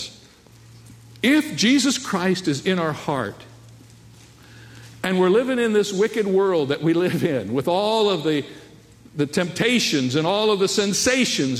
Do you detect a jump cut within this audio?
no; 0 cuts

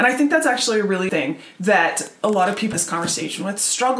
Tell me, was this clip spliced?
yes; 3 cuts; at 1.1 s, 2.2 s, 2.7 s

